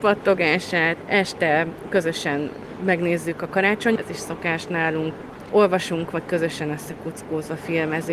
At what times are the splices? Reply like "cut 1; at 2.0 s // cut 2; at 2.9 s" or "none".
cut 1; at 4.0 s